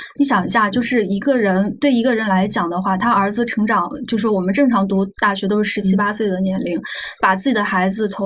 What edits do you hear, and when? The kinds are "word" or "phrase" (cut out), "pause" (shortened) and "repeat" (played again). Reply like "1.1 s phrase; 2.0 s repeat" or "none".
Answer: 7.2 s pause